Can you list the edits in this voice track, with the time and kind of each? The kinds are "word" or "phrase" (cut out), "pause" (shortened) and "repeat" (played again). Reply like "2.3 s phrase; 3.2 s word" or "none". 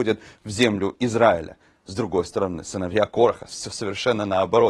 none